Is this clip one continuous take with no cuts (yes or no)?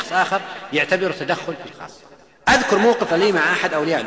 no